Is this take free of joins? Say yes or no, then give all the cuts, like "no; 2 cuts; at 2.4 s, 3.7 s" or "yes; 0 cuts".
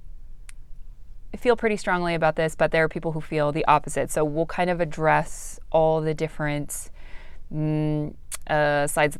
no; 1 cut; at 1.3 s